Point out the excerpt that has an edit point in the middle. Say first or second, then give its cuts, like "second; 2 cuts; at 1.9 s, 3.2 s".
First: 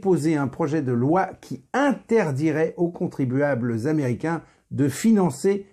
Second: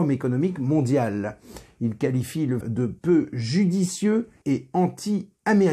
second; 2 cuts; at 2.6 s, 4.4 s